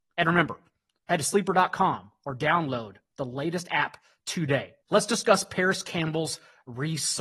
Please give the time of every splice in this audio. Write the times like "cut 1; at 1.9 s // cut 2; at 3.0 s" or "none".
cut 1; at 4.8 s